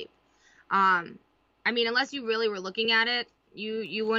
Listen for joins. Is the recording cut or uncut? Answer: uncut